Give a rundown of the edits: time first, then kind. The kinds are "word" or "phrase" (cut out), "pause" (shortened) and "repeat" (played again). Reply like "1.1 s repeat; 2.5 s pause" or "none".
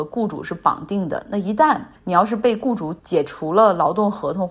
2.0 s pause; 3.0 s pause